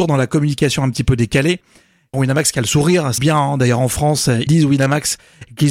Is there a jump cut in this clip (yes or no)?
yes